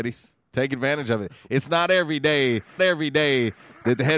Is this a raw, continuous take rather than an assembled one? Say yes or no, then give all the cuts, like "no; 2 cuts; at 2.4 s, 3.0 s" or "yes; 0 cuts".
no; 1 cut; at 2.8 s